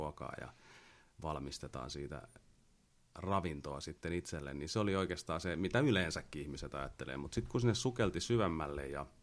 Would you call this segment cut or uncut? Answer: uncut